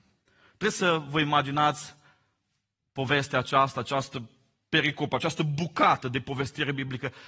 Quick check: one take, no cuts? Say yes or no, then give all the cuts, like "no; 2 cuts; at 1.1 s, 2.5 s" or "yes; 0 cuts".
yes; 0 cuts